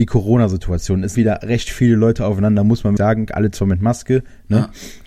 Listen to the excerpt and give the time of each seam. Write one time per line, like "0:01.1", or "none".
0:01.1
0:03.0